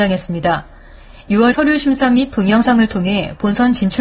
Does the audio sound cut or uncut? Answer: cut